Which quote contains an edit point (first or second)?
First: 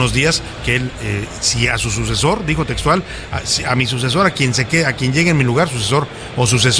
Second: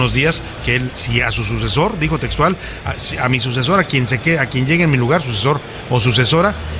second